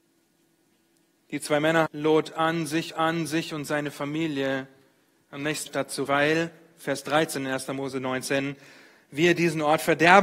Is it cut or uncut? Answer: cut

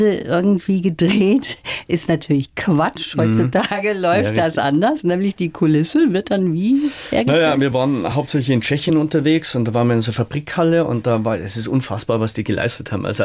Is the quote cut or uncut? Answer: uncut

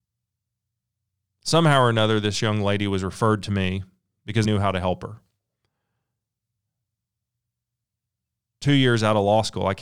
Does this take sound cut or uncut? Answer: cut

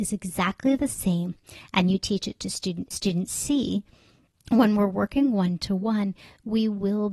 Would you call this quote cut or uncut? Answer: cut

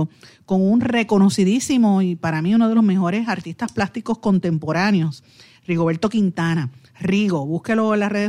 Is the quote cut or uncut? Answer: uncut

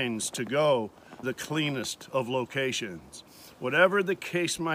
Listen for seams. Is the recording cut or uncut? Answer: cut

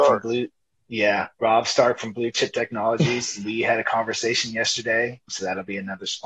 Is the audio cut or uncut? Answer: cut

